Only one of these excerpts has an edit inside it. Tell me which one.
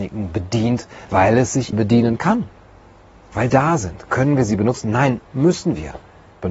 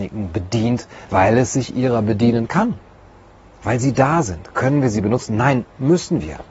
first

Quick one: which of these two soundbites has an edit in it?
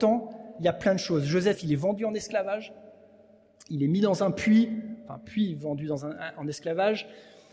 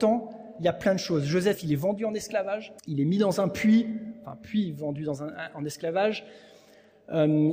second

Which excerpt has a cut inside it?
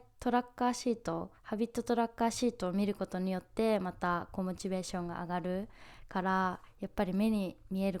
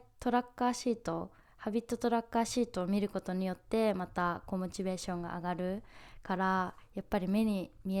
first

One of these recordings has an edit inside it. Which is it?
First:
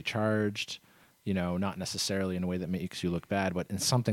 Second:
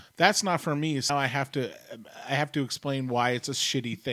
second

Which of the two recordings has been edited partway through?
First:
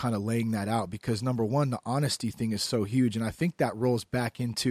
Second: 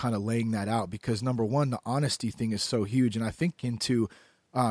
second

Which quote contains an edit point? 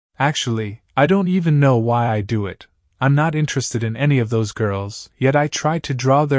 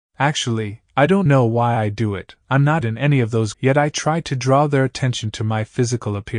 second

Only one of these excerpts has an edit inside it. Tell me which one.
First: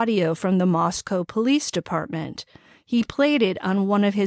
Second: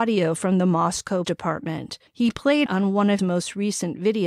second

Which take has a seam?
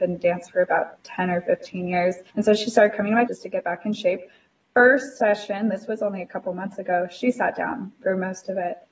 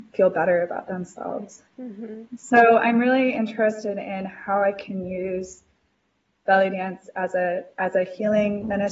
first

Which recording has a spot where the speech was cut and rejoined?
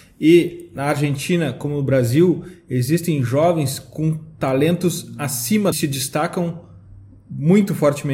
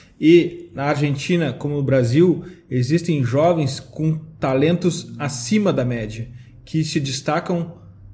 first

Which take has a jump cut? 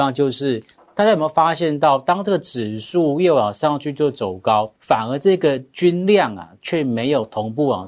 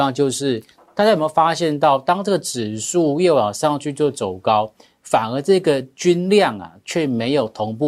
first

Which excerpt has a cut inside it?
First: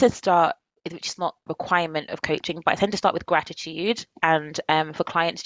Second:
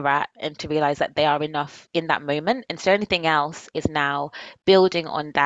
first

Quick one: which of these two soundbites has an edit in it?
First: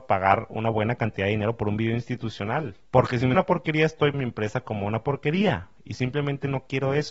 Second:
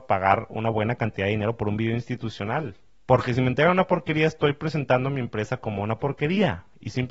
first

